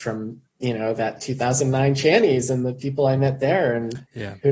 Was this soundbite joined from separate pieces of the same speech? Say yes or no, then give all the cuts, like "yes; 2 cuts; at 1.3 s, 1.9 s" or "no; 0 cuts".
no; 0 cuts